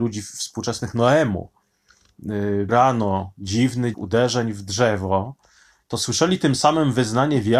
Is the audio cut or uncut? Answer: cut